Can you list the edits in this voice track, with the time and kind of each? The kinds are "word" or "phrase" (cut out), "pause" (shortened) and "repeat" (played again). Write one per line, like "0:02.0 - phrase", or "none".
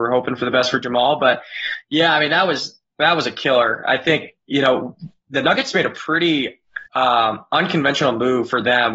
0:06.9 - pause

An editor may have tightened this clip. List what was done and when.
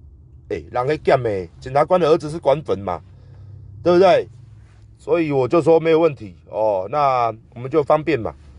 0:07.4 - pause

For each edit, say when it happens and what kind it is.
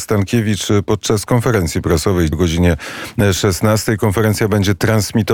0:02.3 - word

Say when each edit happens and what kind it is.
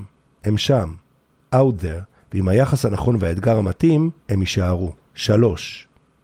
0:04.2 - pause

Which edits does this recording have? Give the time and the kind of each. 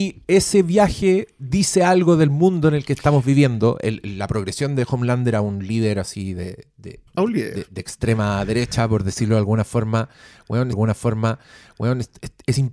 0:07.1 - pause
0:10.7 - repeat

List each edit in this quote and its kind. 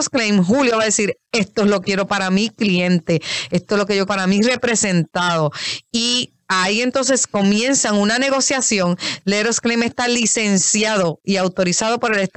0:01.8 - word
0:04.1 - word
0:06.4 - pause

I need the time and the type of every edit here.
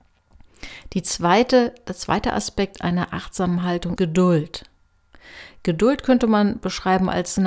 0:04.0 - word

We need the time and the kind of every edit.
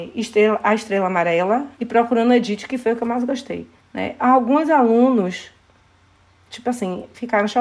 0:01.7 - pause
0:03.8 - pause

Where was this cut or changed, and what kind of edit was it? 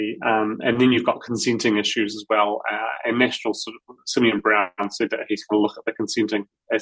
none

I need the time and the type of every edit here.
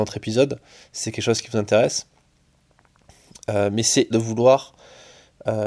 0:04.1 - word

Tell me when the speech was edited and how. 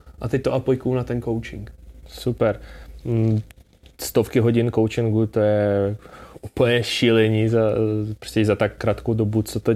none

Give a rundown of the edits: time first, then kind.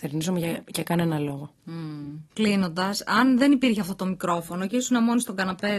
0:02.3 - pause

